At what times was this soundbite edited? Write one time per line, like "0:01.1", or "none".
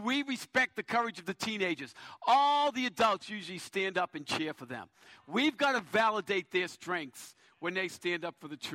none